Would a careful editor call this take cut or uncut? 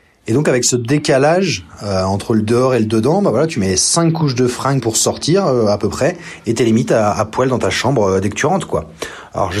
uncut